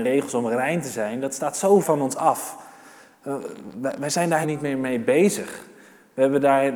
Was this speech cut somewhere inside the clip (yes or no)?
yes